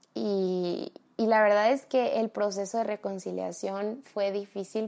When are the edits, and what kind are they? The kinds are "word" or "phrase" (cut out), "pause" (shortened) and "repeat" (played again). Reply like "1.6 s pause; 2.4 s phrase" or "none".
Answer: 1.0 s pause